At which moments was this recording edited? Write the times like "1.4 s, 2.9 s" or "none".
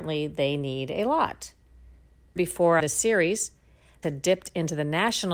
2.4 s, 2.8 s, 4.0 s

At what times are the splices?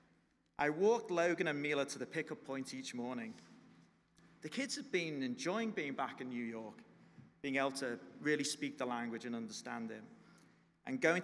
none

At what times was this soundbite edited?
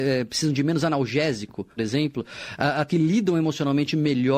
1.8 s, 2.9 s

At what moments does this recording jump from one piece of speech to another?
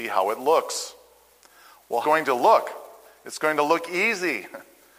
2.0 s

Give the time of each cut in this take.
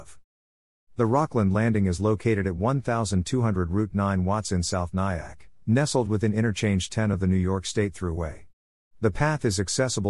none

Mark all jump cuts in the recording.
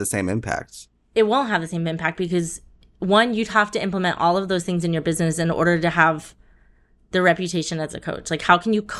none

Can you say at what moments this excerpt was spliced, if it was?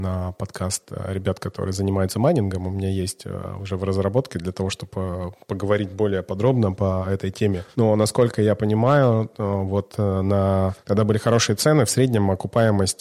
none

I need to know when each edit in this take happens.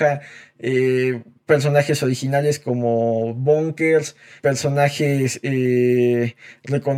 4.4 s

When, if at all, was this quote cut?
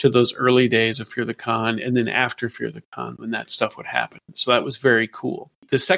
none

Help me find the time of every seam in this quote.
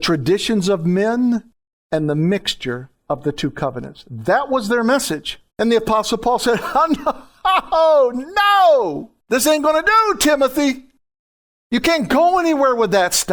1.7 s, 3.0 s, 5.5 s, 9.2 s

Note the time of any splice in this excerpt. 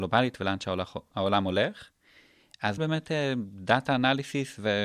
2.8 s

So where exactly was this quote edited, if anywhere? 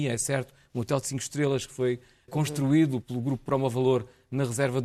2.3 s, 3.0 s

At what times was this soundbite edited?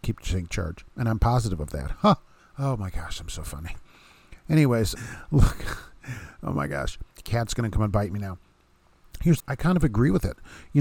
2.4 s, 5.0 s, 7.1 s, 9.4 s

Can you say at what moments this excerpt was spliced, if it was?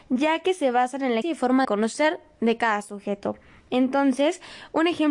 1.2 s, 1.6 s

